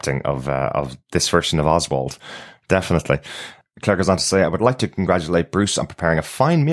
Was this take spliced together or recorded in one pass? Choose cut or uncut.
uncut